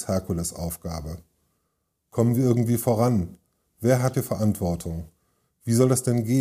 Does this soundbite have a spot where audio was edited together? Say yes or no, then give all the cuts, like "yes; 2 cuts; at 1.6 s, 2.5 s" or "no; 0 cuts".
yes; 1 cut; at 4.1 s